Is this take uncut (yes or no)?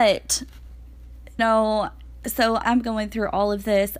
no